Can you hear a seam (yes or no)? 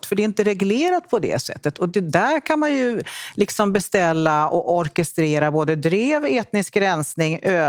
no